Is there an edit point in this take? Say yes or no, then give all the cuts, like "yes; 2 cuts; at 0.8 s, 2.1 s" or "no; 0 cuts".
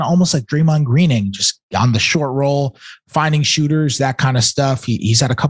no; 0 cuts